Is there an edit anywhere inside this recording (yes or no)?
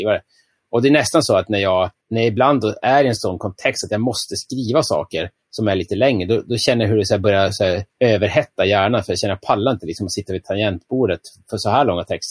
yes